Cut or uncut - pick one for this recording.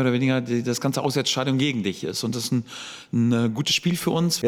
cut